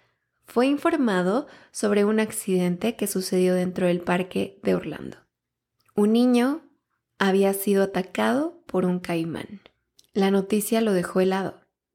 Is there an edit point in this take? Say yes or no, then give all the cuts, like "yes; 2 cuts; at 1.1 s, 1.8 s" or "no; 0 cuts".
no; 0 cuts